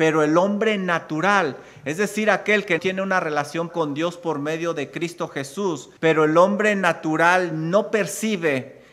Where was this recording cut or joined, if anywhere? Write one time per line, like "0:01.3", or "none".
0:02.8
0:03.7
0:06.0